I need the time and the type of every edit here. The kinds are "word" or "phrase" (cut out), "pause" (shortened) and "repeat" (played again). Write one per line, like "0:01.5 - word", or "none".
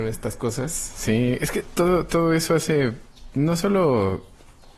none